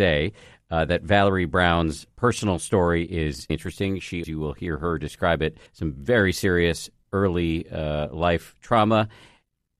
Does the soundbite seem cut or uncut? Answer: cut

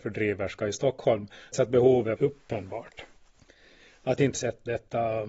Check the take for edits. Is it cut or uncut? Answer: cut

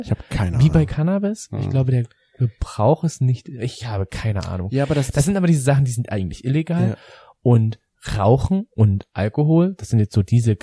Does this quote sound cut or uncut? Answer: uncut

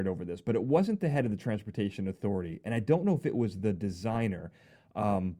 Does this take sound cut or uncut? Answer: uncut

